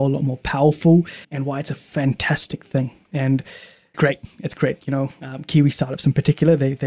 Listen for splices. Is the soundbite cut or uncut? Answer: cut